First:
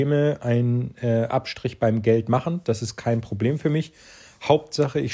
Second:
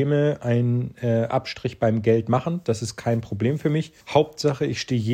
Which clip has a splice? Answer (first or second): second